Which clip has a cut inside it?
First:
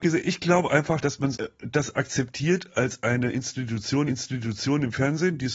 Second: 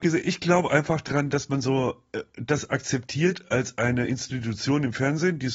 first; 3 cuts; at 1.0 s, 1.3 s, 4.1 s

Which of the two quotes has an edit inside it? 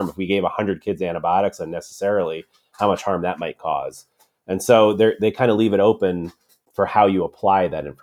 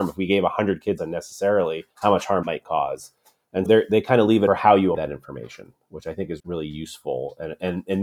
second; 7 cuts; at 1.0 s, 1.9 s, 2.4 s, 3.7 s, 4.5 s, 4.9 s, 6.4 s

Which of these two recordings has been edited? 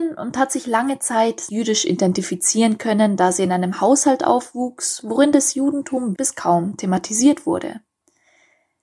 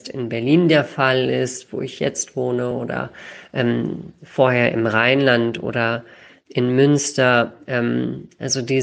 first; 2 cuts; at 1.5 s, 6.1 s

